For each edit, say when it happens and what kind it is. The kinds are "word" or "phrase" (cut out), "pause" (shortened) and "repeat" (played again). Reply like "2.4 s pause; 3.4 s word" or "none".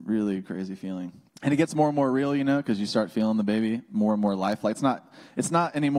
1.3 s word